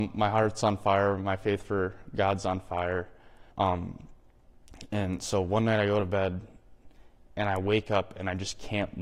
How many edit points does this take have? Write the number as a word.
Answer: one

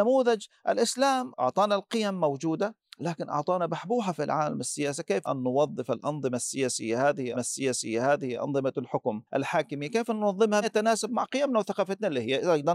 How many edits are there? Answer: five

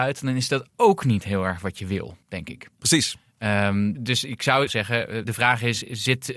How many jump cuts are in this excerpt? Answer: four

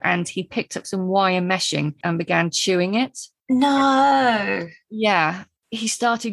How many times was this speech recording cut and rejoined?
one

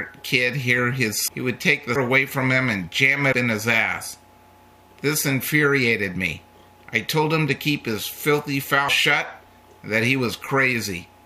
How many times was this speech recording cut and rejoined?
four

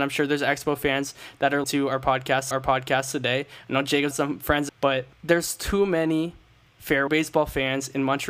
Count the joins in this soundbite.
six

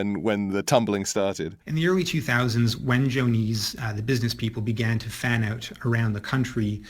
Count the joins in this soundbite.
one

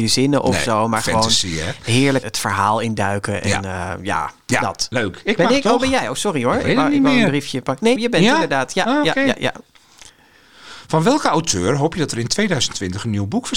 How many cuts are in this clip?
two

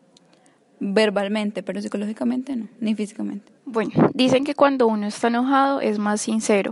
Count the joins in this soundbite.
one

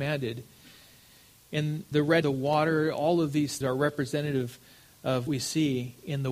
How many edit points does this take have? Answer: four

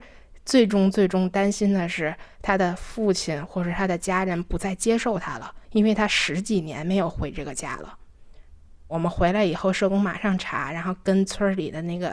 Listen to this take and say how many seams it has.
one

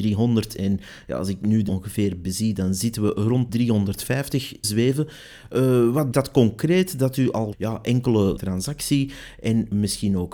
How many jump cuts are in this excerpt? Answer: six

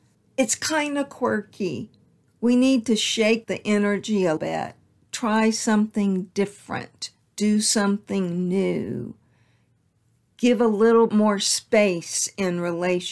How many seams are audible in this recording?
three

